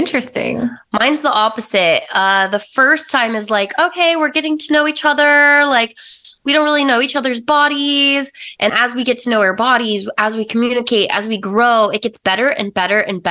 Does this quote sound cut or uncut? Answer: cut